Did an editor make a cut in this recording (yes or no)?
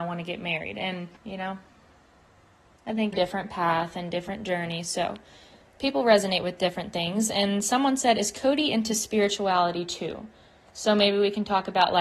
yes